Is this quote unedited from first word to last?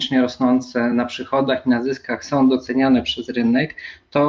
yes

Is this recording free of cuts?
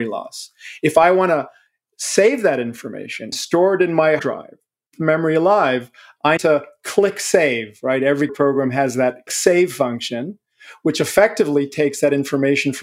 no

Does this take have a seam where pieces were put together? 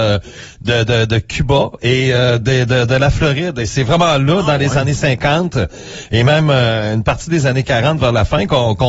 no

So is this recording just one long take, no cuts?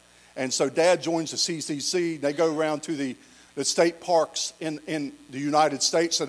yes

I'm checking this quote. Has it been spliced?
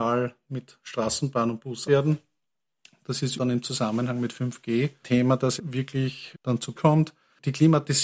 yes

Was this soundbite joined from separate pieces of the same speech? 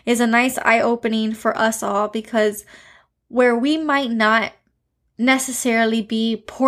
no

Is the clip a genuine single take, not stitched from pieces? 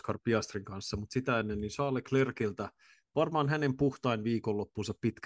yes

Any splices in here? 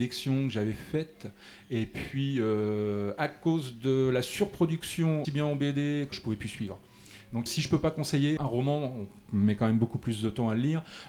yes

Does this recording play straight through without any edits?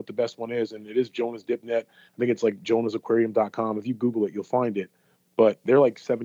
yes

